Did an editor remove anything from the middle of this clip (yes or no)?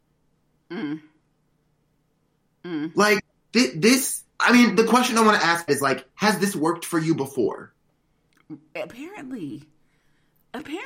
yes